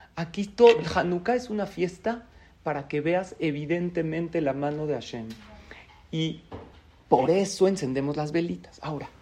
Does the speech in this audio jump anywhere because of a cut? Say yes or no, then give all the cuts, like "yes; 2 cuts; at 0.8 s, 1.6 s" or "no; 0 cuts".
no; 0 cuts